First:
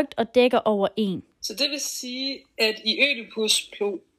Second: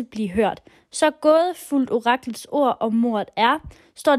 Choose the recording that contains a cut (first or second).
first